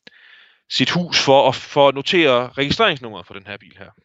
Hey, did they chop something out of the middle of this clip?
no; 0 cuts

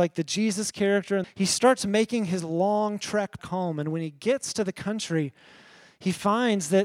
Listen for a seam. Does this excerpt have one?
yes; 2 cuts; at 1.2 s, 3.4 s

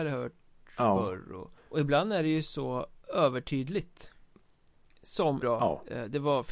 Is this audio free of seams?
no; 3 cuts; at 1.6 s, 3.0 s, 5.4 s

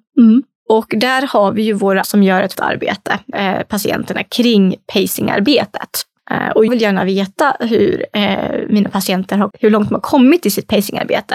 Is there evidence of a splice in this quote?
yes; 5 cuts; at 2.0 s, 2.5 s, 3.3 s, 6.7 s, 9.5 s

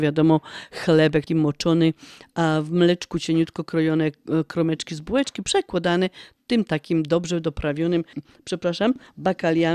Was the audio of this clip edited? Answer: yes; 2 cuts; at 1.3 s, 8.1 s

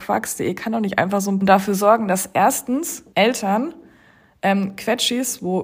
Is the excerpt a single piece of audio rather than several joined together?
no; 2 cuts; at 1.4 s, 3.1 s

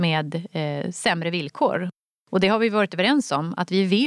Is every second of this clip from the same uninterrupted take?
yes; 0 cuts

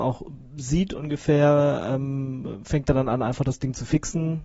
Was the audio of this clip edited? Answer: no; 0 cuts

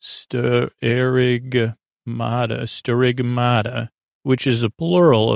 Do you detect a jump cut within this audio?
no; 0 cuts

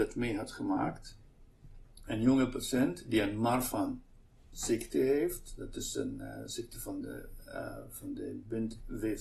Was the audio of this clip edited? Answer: no; 0 cuts

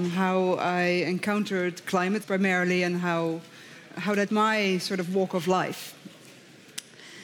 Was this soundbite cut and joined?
yes; 2 cuts; at 2.2 s, 4.3 s

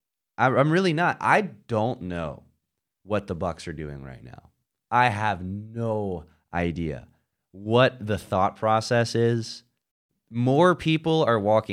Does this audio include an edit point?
no; 0 cuts

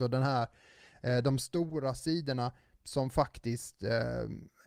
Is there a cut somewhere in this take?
no; 0 cuts

